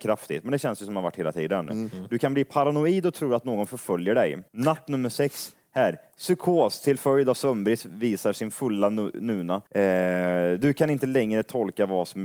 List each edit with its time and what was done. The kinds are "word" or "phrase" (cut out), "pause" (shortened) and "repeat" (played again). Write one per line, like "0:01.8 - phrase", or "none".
0:04.5 - pause
0:09.7 - pause